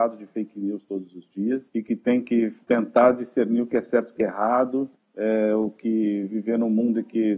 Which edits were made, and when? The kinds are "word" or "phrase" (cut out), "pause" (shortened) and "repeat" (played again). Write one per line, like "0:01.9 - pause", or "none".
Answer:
0:01.7 - pause
0:02.6 - pause
0:04.9 - pause